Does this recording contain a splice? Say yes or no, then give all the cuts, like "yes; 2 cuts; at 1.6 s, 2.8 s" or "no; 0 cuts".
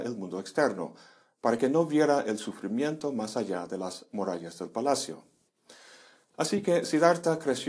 no; 0 cuts